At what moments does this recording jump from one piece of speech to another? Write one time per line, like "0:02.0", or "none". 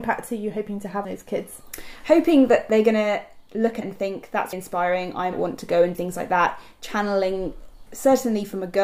0:01.0
0:03.8
0:04.5
0:05.3
0:05.9
0:07.9